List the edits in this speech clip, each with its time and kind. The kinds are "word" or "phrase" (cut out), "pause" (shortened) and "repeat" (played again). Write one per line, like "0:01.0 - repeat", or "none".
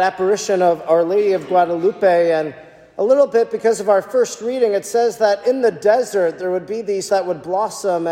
0:07.1 - word